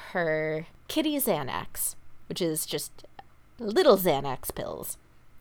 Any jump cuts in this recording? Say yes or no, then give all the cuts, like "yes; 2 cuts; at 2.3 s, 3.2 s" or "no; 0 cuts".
no; 0 cuts